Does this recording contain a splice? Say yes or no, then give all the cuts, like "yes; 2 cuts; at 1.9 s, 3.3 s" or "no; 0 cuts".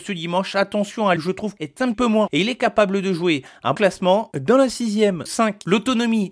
yes; 6 cuts; at 1.2 s, 1.6 s, 1.9 s, 2.3 s, 3.7 s, 5.3 s